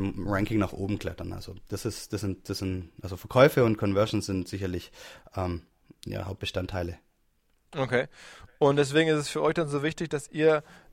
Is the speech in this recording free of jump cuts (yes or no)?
yes